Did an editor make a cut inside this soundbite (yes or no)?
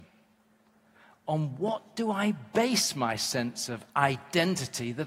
no